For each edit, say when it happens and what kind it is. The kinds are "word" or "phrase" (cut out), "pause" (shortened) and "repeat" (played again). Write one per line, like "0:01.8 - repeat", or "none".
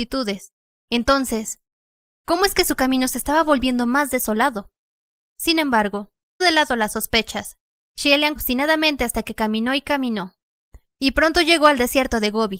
0:06.4 - word
0:08.4 - word